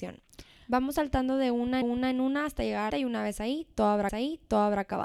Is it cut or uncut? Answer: cut